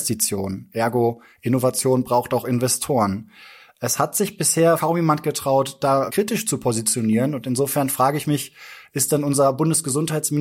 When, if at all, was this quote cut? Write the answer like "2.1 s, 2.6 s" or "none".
6.1 s